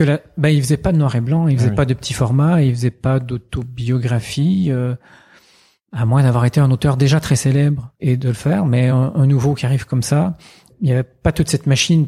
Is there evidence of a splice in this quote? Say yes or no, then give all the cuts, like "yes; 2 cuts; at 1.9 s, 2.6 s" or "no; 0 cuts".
no; 0 cuts